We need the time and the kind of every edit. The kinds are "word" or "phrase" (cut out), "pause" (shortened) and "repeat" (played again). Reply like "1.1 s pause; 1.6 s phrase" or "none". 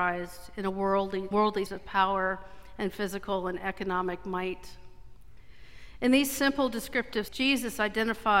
1.3 s word; 1.7 s word; 7.3 s word

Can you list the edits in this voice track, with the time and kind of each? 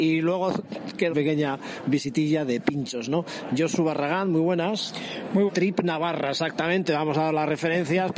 1.1 s phrase; 5.5 s phrase

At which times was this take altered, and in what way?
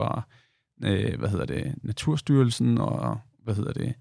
none

